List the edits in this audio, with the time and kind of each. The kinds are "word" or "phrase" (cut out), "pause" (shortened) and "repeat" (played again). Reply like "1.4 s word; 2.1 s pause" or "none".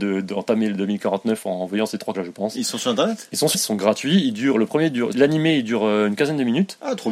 2.1 s phrase; 3.5 s word; 5.1 s word